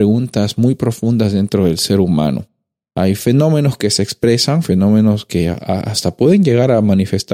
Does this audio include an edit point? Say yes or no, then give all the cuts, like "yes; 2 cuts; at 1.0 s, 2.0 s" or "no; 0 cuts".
no; 0 cuts